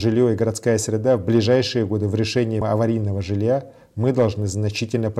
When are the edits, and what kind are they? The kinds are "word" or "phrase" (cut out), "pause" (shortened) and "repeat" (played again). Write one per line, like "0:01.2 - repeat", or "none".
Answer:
0:02.6 - word